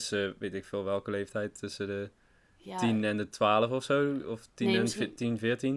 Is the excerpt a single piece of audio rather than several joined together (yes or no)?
yes